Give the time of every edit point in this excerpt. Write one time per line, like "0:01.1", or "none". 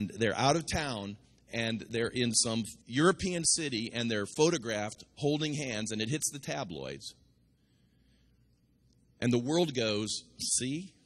0:02.8